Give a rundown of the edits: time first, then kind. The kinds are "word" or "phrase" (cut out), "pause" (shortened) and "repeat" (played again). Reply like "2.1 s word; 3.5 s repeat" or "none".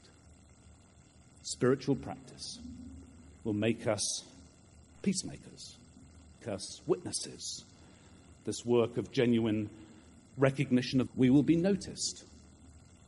6.4 s phrase; 11.1 s word